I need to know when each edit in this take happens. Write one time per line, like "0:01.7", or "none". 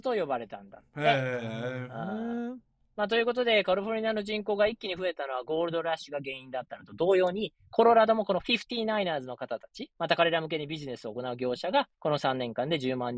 0:09.9
0:11.9